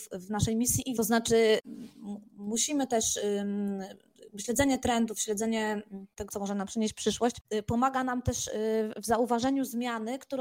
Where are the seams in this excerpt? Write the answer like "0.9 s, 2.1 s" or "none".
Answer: 1.0 s, 6.3 s